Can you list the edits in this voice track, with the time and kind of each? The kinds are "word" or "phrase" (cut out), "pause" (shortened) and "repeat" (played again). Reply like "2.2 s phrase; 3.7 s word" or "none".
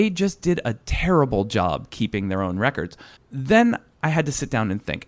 3.2 s pause